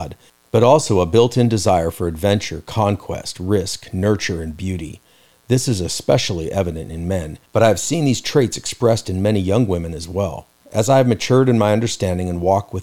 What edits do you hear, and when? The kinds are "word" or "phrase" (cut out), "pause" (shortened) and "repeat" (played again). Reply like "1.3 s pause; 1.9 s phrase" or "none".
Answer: 7.5 s pause; 10.5 s pause